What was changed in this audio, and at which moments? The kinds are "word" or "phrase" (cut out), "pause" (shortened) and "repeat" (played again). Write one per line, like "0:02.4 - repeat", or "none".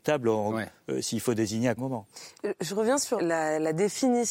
0:01.8 - phrase
0:03.2 - word